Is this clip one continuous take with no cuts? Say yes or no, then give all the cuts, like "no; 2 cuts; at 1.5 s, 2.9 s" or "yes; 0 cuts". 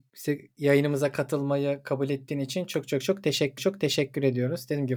no; 1 cut; at 3.6 s